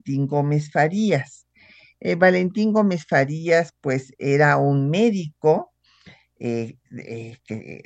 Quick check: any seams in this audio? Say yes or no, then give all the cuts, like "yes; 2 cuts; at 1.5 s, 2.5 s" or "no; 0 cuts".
no; 0 cuts